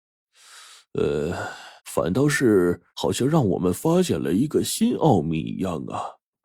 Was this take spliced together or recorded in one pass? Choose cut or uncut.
cut